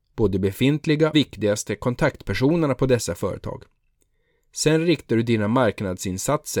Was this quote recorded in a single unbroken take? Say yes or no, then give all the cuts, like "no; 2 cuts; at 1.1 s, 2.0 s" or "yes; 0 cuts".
no; 1 cut; at 1.1 s